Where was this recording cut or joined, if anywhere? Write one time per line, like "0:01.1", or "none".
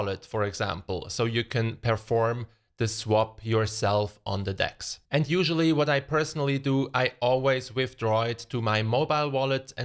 none